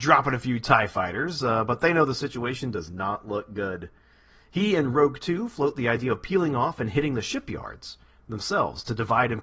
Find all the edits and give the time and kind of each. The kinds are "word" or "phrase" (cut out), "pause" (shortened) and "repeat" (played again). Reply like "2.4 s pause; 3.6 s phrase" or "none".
none